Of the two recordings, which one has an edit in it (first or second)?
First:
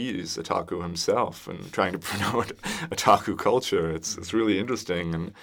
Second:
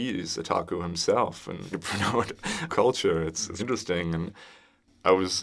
second